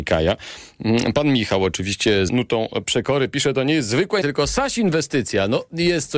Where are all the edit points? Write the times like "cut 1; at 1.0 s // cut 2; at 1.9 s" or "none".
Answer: cut 1; at 2.3 s // cut 2; at 4.2 s